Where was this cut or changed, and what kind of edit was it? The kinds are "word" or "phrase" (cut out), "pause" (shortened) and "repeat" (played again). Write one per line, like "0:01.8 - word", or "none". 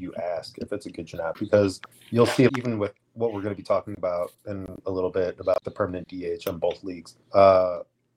0:01.1 - word
0:01.9 - pause
0:02.5 - word
0:03.0 - pause
0:04.4 - pause
0:05.6 - word
0:07.2 - pause